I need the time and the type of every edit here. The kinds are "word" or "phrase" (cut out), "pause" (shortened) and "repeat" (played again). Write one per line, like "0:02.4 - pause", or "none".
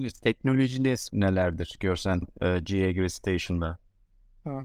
0:01.1 - phrase
0:02.2 - word